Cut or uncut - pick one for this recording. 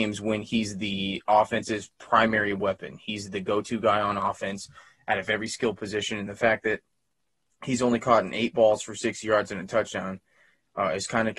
uncut